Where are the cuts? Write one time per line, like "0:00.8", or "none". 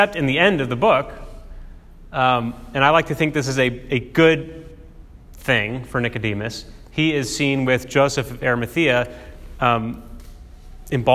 none

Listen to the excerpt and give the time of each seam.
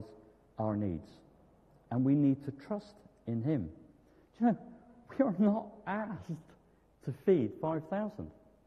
none

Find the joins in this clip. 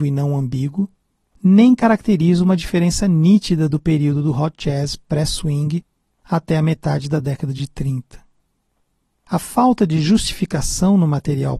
none

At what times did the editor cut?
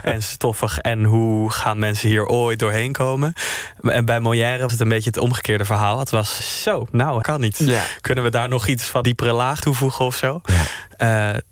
0:04.7
0:06.4
0:07.2
0:09.0
0:09.6

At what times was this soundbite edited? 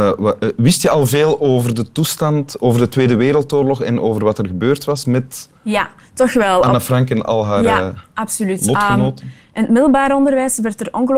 0:05.6

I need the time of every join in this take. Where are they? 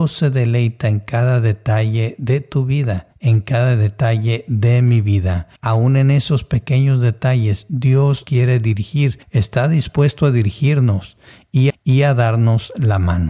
0:03.1
0:05.6
0:08.2
0:09.2
0:11.7

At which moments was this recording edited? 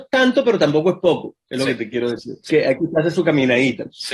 0:02.5

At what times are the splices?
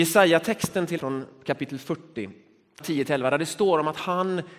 0:01.0
0:02.8

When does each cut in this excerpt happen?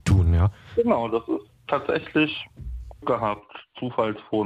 0:03.0

